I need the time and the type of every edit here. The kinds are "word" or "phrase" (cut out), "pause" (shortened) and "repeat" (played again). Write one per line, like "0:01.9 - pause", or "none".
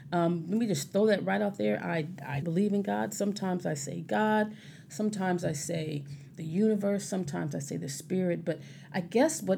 0:02.4 - word

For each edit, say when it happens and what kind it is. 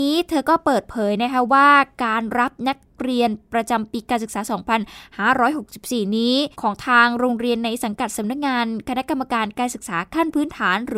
0:06.5 - pause

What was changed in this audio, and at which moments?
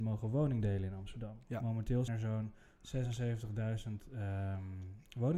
0:02.1 - word

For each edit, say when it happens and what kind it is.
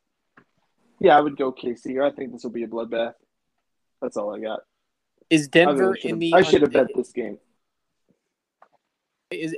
none

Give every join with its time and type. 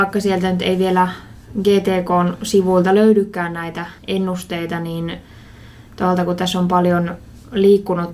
0:04.0 - pause

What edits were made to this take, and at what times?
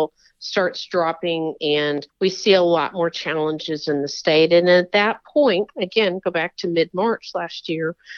0:02.1 - pause

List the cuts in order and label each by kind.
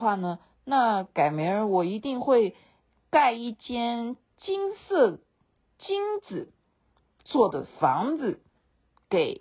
none

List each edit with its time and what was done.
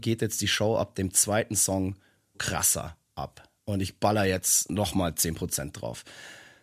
0:02.3 - word
0:03.6 - pause

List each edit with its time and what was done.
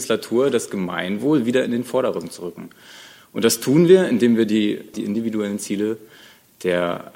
none

